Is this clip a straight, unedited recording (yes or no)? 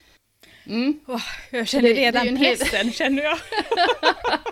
yes